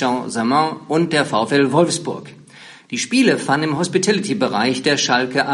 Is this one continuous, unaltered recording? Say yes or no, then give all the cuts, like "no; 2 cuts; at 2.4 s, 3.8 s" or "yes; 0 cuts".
yes; 0 cuts